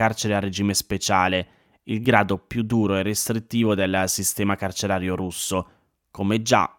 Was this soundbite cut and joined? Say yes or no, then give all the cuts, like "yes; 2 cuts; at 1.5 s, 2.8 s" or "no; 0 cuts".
no; 0 cuts